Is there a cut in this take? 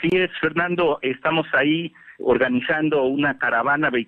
yes; 1 cut; at 2.2 s

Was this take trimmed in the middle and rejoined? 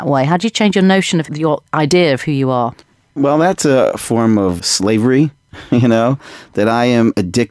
yes; 3 cuts; at 1.3 s, 2.8 s, 4.6 s

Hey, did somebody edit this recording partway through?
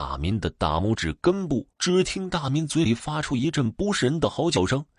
yes; 1 cut; at 1.7 s

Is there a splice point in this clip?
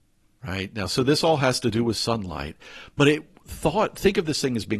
no; 0 cuts

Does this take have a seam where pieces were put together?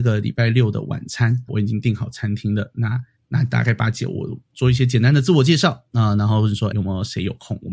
yes; 3 cuts; at 1.5 s, 3.1 s, 6.7 s

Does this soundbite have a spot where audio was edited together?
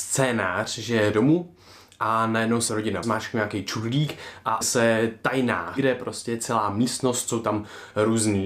yes; 5 cuts; at 1.1 s, 2.7 s, 3.0 s, 4.6 s, 5.8 s

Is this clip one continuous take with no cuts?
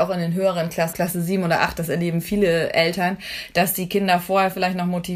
no; 1 cut; at 0.9 s

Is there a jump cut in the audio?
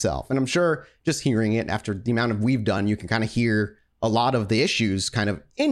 no; 0 cuts

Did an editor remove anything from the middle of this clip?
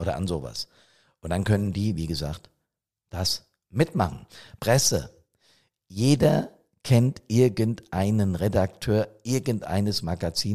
no; 0 cuts

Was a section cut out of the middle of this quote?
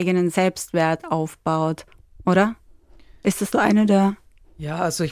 yes; 1 cut; at 3.5 s

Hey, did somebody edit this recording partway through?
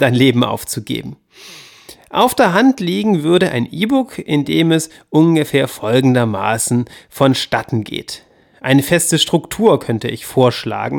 no; 0 cuts

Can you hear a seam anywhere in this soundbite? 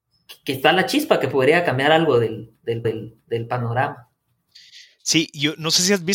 yes; 1 cut; at 2.8 s

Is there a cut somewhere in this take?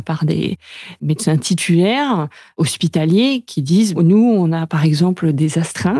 no; 0 cuts

